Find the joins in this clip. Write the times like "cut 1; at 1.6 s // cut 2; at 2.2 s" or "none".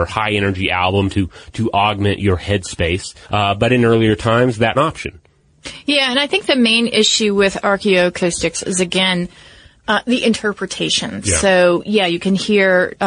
cut 1; at 3.2 s // cut 2; at 4.7 s